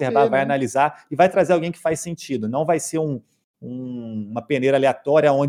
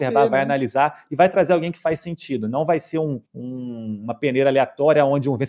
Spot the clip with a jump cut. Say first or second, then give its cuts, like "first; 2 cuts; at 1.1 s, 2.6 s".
second; 1 cut; at 3.3 s